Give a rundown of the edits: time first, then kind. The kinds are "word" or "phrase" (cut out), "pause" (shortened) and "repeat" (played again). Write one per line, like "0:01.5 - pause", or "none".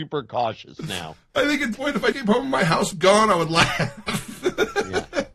0:01.7 - word
0:02.1 - word
0:02.9 - word